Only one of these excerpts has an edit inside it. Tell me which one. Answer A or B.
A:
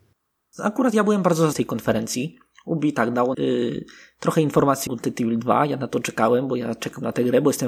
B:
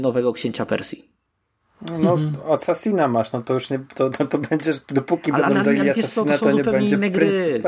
A